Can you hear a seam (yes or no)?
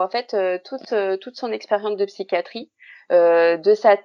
no